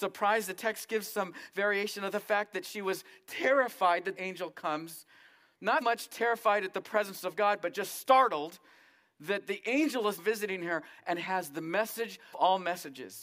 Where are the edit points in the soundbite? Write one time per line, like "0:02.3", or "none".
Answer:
0:04.2
0:05.8
0:10.2
0:12.3